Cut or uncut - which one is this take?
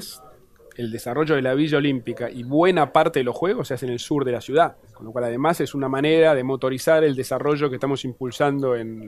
cut